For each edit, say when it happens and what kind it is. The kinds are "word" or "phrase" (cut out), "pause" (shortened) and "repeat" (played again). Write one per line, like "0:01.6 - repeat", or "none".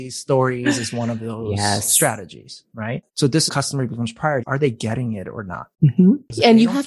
0:03.1 - pause
0:03.5 - phrase
0:04.4 - word
0:05.7 - pause

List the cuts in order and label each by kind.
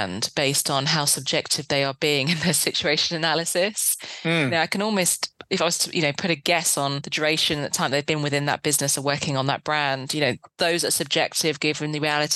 none

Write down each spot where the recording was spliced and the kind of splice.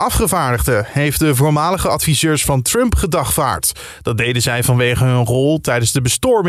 none

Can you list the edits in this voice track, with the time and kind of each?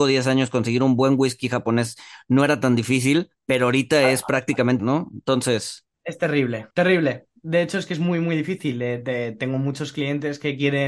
0:03.4 - pause
0:04.8 - word
0:05.9 - pause
0:06.7 - pause

